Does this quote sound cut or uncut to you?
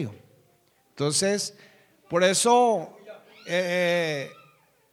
uncut